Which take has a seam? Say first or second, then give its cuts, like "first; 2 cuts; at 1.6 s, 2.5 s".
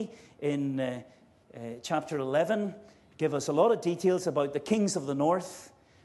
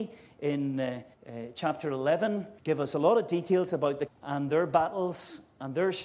second; 3 cuts; at 1.1 s, 2.6 s, 4.1 s